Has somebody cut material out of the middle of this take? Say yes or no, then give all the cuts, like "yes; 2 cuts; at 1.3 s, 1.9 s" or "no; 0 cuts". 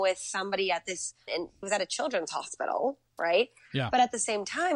yes; 2 cuts; at 1.3 s, 1.6 s